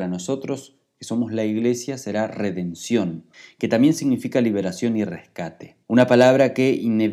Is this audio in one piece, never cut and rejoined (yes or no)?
no